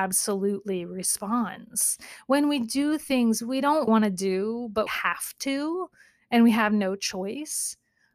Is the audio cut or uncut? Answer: cut